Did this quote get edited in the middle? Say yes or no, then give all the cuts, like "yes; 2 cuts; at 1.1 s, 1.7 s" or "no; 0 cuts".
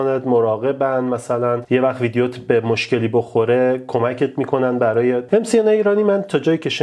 yes; 1 cut; at 5.3 s